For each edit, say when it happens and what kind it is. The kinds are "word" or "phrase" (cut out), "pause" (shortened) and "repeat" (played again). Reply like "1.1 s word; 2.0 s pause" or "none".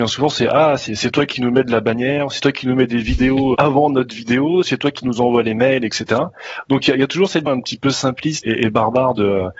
3.5 s word; 7.5 s word; 8.4 s word